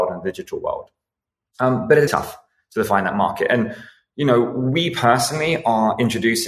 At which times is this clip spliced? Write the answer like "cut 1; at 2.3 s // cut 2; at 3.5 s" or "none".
cut 1; at 2.1 s

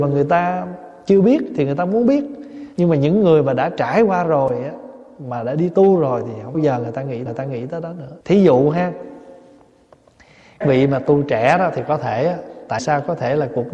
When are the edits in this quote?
cut 1; at 2.7 s // cut 2; at 6.5 s // cut 3; at 7.3 s // cut 4; at 8.2 s // cut 5; at 10.6 s // cut 6; at 12.8 s

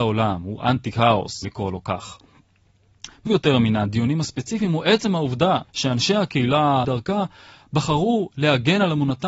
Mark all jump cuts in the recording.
cut 1; at 1.4 s // cut 2; at 3.3 s // cut 3; at 5.7 s // cut 4; at 6.8 s

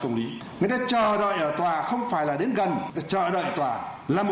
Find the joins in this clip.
cut 1; at 2.9 s

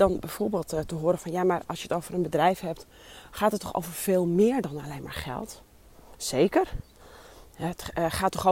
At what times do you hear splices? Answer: none

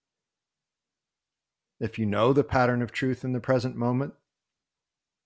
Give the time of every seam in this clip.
none

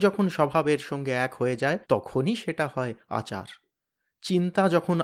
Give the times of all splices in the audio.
cut 1; at 1.8 s

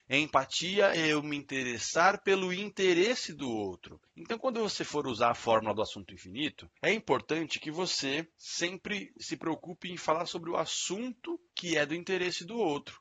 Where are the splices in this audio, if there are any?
cut 1; at 4.1 s // cut 2; at 6.8 s // cut 3; at 8.3 s // cut 4; at 11.5 s

